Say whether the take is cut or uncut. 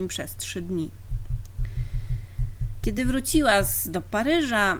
uncut